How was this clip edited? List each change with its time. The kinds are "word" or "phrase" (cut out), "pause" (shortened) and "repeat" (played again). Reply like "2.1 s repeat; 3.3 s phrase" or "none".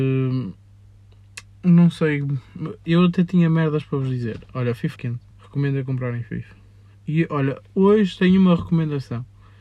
5.0 s word; 5.3 s pause